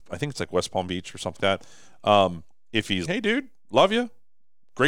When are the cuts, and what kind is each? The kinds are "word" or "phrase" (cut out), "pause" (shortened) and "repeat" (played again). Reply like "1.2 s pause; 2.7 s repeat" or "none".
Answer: 1.4 s word; 3.1 s word